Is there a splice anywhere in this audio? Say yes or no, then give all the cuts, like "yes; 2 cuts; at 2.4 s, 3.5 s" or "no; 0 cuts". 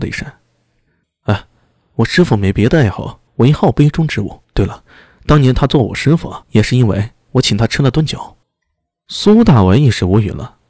yes; 4 cuts; at 3.3 s, 4.4 s, 6.4 s, 8.4 s